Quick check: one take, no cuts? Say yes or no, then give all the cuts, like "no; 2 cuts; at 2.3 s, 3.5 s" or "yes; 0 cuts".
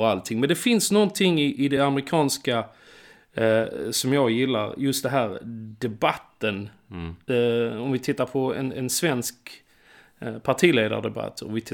yes; 0 cuts